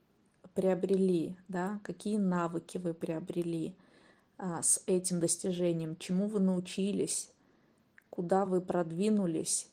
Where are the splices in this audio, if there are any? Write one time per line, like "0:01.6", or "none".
none